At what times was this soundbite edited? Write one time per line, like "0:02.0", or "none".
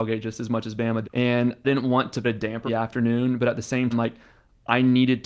0:01.0
0:01.6
0:02.2
0:02.7
0:03.9